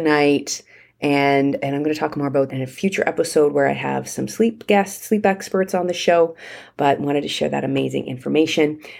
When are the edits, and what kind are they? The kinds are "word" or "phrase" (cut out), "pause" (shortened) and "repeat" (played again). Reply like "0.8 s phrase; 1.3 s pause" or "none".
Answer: 2.5 s word